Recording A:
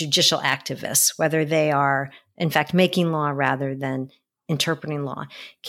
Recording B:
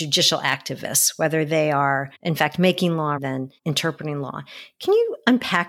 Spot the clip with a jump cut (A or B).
B